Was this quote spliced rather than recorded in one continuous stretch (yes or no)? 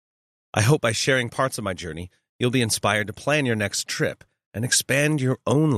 no